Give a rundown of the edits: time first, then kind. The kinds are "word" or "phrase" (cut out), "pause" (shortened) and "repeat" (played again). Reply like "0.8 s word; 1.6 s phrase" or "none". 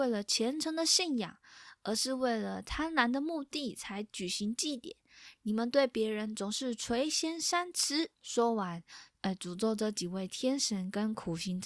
8.1 s pause